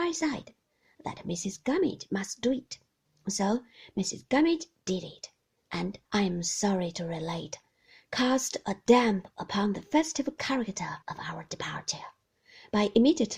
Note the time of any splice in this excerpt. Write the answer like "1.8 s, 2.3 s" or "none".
6.0 s, 11.0 s

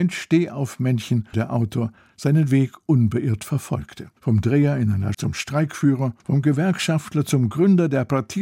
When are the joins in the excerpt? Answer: 1.3 s, 4.2 s, 5.1 s, 6.2 s

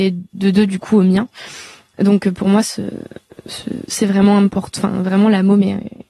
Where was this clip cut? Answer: none

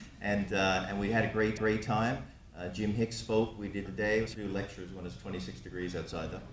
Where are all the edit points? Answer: 1.6 s, 3.9 s, 4.3 s

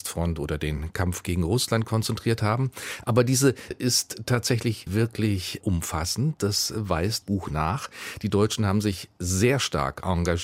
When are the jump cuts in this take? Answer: 3.7 s, 4.9 s, 5.6 s, 7.2 s

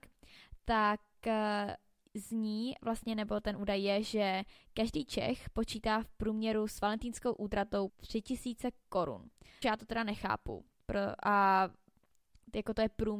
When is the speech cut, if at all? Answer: 7.9 s, 9.6 s

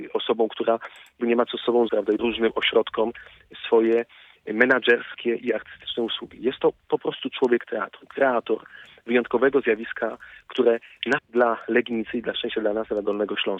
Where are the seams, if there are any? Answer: 1.2 s, 1.9 s, 2.2 s, 11.2 s

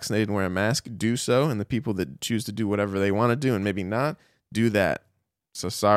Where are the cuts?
none

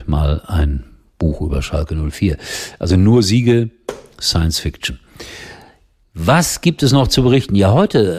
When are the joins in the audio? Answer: none

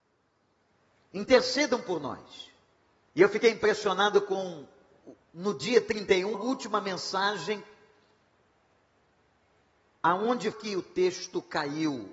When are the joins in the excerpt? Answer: 2.7 s, 5.2 s, 6.3 s, 10.5 s

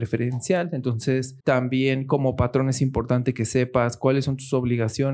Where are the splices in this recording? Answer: 1.4 s

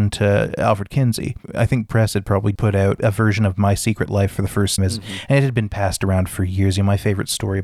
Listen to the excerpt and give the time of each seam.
1.9 s, 2.6 s, 4.8 s

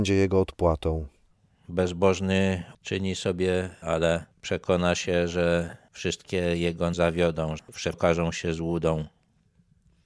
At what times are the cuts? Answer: 3.8 s, 6.9 s, 7.9 s

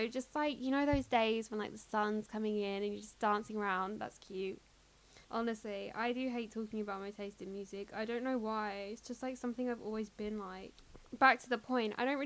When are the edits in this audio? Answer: 5.2 s, 11.1 s

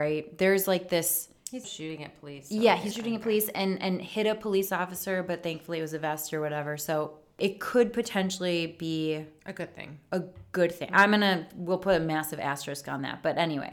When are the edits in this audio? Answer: 1.6 s, 2.9 s

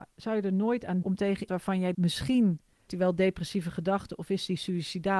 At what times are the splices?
1.0 s, 1.5 s, 1.9 s, 2.9 s

